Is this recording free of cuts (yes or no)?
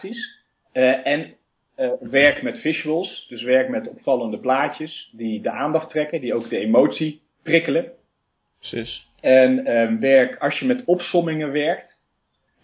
yes